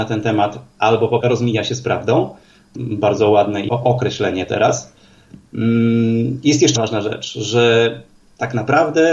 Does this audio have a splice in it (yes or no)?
yes